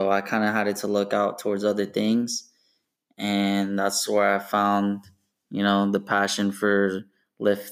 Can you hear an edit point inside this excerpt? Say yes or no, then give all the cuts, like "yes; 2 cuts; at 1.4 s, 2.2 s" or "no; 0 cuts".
no; 0 cuts